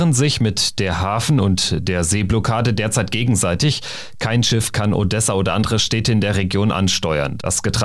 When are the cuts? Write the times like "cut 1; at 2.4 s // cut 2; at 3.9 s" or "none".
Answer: none